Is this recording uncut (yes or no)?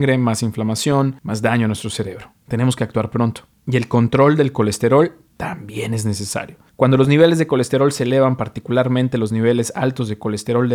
yes